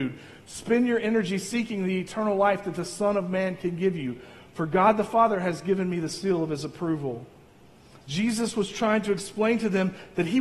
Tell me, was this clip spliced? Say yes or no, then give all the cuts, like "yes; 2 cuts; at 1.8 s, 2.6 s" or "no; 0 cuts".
no; 0 cuts